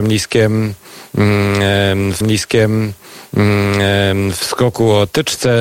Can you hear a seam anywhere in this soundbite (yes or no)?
yes